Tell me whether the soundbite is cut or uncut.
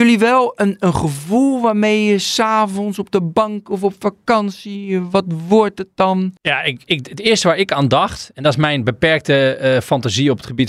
cut